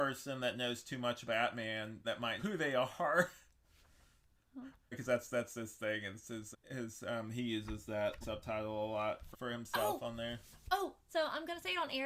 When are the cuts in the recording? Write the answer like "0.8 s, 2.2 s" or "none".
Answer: 1.3 s, 2.0 s, 2.4 s, 4.9 s, 6.5 s, 8.2 s, 9.3 s, 11.1 s